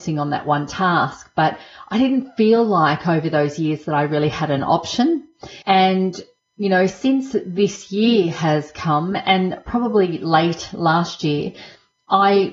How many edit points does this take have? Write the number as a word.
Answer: one